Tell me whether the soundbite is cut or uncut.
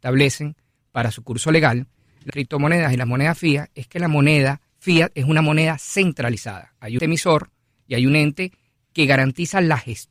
cut